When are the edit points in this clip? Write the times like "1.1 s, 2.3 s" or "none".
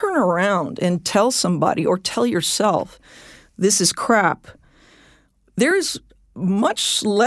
none